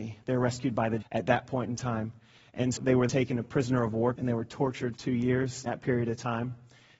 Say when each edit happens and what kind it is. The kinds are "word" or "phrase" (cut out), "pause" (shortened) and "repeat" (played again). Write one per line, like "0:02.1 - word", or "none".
0:01.0 - word
0:02.8 - word
0:03.1 - word
0:04.1 - word
0:04.9 - word
0:05.7 - word